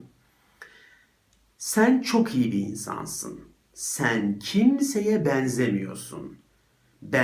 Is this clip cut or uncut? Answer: uncut